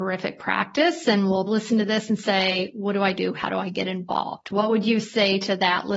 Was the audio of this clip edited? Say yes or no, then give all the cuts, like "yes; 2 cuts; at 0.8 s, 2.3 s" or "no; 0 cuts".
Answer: yes; 1 cut; at 1.5 s